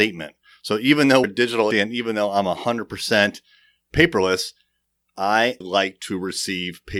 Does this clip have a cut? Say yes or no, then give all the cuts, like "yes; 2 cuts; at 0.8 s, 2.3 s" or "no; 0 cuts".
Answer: yes; 3 cuts; at 1.2 s, 1.7 s, 5.6 s